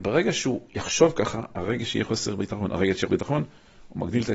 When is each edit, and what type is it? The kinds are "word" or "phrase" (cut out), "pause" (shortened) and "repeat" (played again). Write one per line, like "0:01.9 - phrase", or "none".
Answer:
0:03.1 - word